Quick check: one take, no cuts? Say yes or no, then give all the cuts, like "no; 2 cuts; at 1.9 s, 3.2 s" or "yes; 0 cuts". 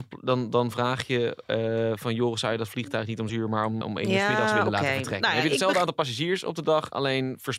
no; 2 cuts; at 3.3 s, 3.8 s